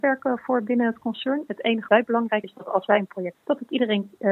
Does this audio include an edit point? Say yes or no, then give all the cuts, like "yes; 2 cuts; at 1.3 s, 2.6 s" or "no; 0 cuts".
yes; 3 cuts; at 1.9 s, 2.4 s, 3.3 s